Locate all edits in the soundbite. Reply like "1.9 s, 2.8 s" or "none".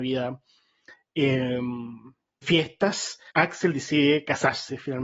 2.4 s, 3.3 s